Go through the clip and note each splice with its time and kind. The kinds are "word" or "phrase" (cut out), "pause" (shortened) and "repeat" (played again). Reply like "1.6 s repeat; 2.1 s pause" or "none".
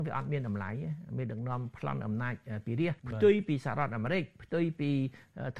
3.0 s pause